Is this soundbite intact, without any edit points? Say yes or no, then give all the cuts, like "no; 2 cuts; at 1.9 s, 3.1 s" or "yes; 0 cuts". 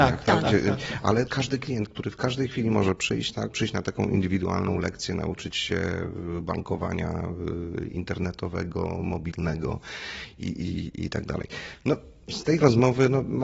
no; 2 cuts; at 1.3 s, 3.5 s